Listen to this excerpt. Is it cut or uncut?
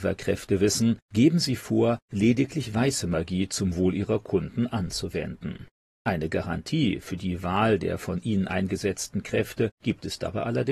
uncut